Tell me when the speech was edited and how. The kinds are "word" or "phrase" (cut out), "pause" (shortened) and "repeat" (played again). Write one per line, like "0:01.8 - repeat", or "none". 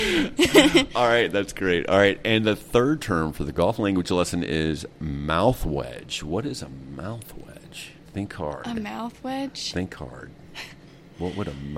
0:08.1 - pause